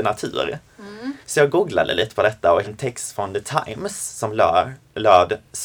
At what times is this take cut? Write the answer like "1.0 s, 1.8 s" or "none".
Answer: 1.2 s, 2.6 s

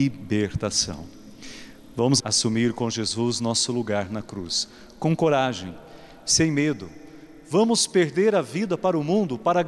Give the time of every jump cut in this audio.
2.2 s

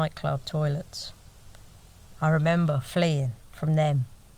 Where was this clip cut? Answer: 3.4 s

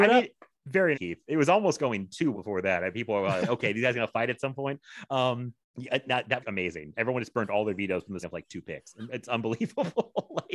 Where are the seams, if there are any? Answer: 0.9 s, 2.3 s, 3.4 s, 5.6 s, 6.4 s, 8.2 s

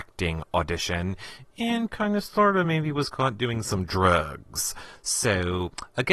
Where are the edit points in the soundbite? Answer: none

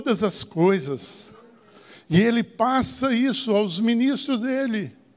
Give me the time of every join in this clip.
none

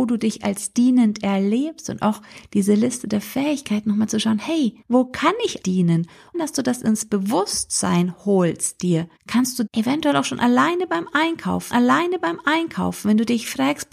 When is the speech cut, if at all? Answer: 4.8 s, 5.6 s, 6.3 s, 9.2 s, 9.7 s, 11.7 s

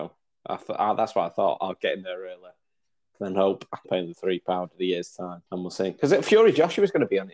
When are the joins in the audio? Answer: 3.8 s, 5.5 s

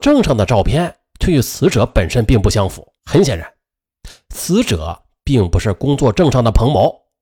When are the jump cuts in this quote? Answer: 3.0 s

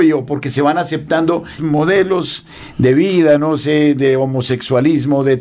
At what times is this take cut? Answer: 1.6 s

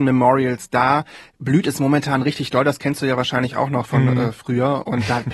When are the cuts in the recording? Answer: none

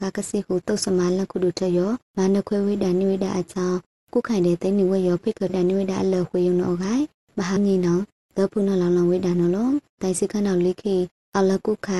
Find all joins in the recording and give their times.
5.5 s, 7.6 s, 10.0 s

